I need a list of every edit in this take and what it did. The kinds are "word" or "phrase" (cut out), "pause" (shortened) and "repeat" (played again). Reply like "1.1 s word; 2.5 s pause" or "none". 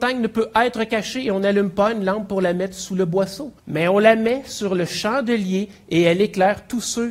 3.6 s pause

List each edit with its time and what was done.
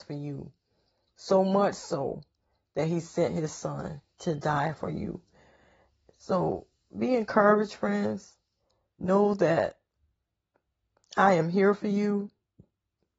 none

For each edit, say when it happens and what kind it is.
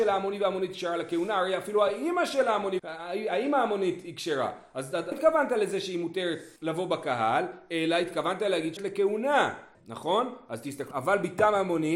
2.8 s word; 5.1 s word; 6.6 s pause; 8.8 s word; 9.7 s pause; 10.9 s phrase

